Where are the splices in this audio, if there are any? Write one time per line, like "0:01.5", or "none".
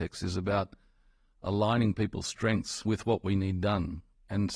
none